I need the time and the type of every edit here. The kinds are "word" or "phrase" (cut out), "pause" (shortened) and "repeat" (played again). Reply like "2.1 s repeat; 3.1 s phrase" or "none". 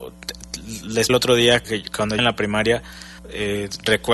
1.1 s word; 1.6 s word; 2.2 s word; 3.2 s pause